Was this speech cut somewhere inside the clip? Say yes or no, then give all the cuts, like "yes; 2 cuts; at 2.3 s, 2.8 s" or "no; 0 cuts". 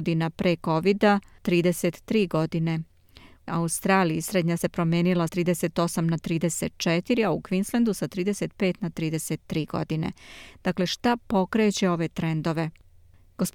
yes; 4 cuts; at 1.4 s, 3.5 s, 4.6 s, 5.3 s